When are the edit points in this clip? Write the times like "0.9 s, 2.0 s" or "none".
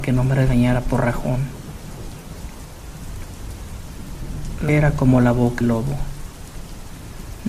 4.7 s, 5.6 s